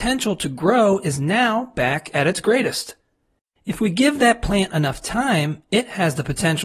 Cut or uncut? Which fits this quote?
uncut